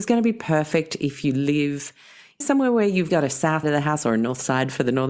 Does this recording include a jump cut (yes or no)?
yes